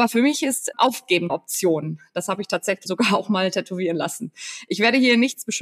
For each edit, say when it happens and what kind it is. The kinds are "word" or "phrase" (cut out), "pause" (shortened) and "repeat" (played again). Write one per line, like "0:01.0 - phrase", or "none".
0:01.3 - word
0:02.9 - word